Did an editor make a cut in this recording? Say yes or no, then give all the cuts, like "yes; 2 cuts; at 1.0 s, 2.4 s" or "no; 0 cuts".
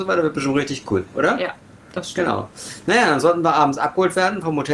no; 0 cuts